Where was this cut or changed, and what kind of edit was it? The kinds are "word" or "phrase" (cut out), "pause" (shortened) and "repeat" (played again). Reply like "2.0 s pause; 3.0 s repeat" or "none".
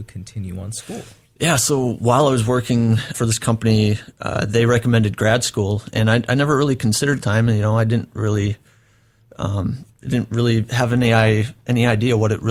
3.1 s word; 7.2 s phrase; 9.9 s pause